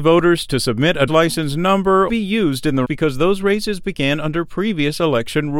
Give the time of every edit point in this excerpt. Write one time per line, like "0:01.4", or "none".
0:01.1
0:02.1
0:02.8